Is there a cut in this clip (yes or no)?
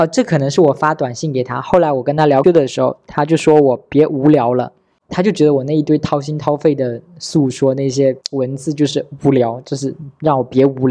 yes